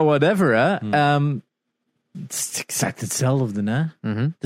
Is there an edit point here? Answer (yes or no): yes